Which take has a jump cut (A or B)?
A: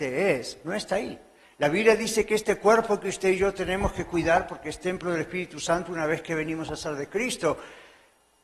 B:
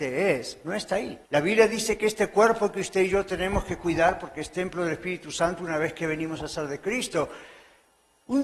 B